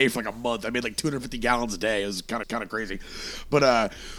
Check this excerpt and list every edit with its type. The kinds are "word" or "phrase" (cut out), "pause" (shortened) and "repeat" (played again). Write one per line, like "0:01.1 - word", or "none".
0:02.4 - repeat